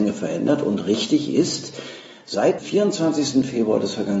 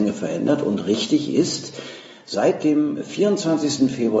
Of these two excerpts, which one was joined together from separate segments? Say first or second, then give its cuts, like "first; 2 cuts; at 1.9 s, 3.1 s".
first; 1 cut; at 2.6 s